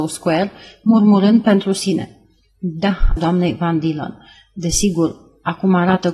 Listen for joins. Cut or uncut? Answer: cut